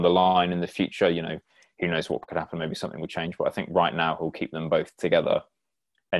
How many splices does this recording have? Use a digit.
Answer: 0